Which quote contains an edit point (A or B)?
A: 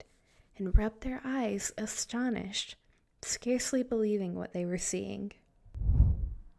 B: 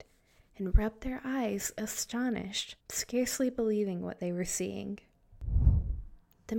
B